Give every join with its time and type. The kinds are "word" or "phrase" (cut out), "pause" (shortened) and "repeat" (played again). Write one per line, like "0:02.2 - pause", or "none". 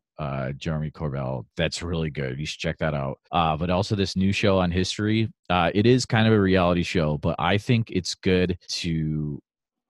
0:03.2 - pause
0:05.4 - pause
0:08.6 - pause